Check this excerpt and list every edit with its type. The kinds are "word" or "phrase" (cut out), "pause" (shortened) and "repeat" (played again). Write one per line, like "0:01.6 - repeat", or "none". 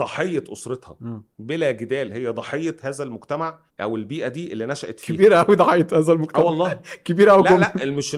0:03.7 - pause